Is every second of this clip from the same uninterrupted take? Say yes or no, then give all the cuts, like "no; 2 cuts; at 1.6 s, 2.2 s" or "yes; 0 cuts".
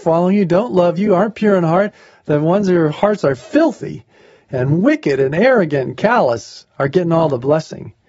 yes; 0 cuts